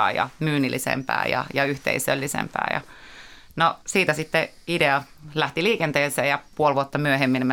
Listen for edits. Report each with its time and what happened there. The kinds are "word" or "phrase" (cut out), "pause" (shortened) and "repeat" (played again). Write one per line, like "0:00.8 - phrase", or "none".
0:03.8 - pause